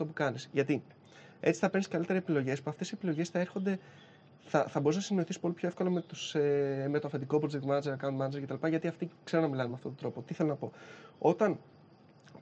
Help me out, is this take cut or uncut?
uncut